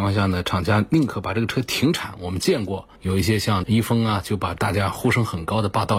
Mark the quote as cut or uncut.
cut